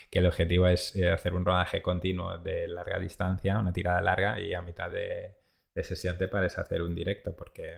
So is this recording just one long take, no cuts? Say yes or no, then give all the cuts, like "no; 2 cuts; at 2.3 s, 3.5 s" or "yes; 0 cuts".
yes; 0 cuts